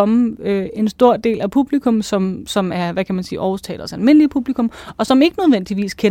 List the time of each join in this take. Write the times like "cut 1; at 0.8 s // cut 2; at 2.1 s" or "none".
none